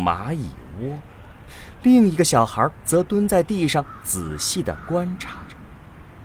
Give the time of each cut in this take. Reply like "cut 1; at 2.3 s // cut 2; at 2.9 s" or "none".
none

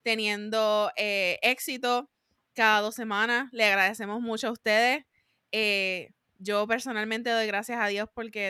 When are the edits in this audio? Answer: none

